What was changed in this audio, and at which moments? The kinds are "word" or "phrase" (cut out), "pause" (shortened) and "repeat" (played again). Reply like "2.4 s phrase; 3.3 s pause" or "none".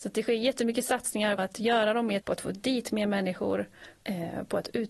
1.4 s word; 2.2 s word; 4.0 s word